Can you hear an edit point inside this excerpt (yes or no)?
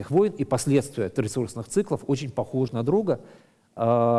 yes